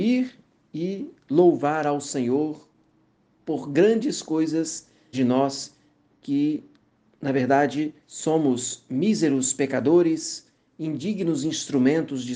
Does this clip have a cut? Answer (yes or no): yes